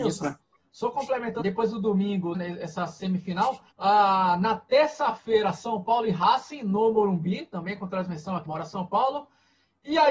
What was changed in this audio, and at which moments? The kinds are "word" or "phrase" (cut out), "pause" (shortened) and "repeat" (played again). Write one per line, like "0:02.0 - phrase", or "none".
0:01.4 - word
0:02.3 - word
0:03.7 - pause
0:08.4 - word